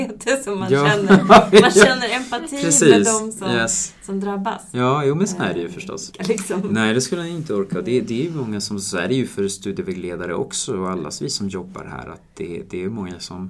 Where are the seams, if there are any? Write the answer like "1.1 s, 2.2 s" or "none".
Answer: none